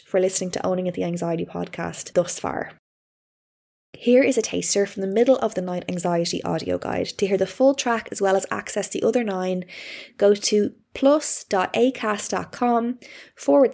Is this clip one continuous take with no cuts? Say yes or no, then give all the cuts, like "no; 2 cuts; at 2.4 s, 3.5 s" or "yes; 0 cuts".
yes; 0 cuts